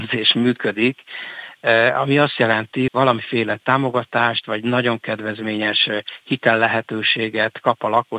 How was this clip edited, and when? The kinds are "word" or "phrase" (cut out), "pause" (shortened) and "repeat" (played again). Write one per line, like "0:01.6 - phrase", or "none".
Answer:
0:02.9 - word